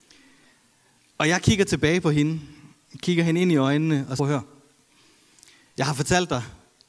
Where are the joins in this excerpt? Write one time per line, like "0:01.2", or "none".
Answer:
0:04.2